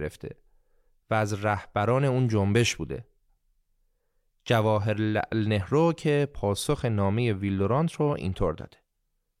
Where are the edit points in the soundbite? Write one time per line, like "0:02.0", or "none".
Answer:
none